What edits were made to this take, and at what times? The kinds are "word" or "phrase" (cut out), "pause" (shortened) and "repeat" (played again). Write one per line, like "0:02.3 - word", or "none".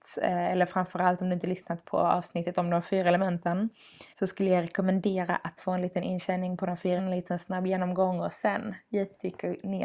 0:04.1 - pause
0:05.6 - phrase
0:07.0 - word

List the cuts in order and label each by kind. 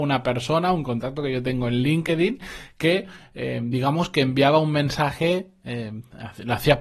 none

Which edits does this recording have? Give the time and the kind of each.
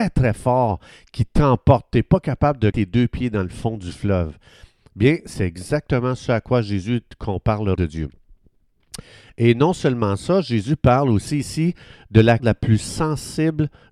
0:02.7 - word
0:07.7 - word
0:12.4 - word

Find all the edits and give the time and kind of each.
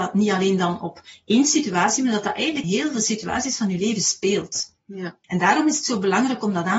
0:02.6 - word
0:05.2 - pause

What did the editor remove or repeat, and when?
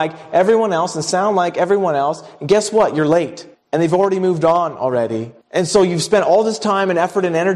0:03.5 - pause
0:05.4 - pause

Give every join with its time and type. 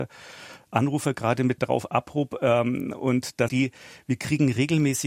0:01.6 - word
0:03.5 - word

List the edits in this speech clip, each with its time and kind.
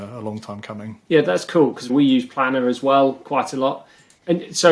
0:01.0 - pause
0:01.9 - phrase

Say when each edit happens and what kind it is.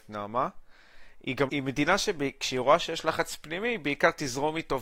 0:01.5 - word

